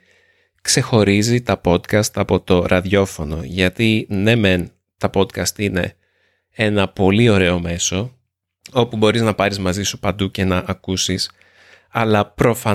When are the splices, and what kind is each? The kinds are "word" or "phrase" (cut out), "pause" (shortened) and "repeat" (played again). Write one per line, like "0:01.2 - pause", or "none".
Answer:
none